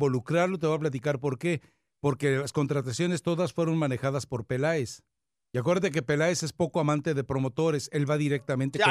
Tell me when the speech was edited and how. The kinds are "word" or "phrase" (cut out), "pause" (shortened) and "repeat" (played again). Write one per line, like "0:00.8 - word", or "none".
none